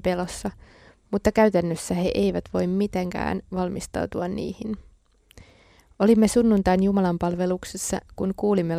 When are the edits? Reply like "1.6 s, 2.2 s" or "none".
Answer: none